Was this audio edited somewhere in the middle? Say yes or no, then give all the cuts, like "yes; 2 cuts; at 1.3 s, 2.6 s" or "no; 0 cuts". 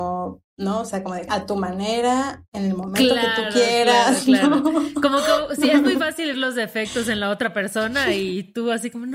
yes; 2 cuts; at 1.3 s, 6.3 s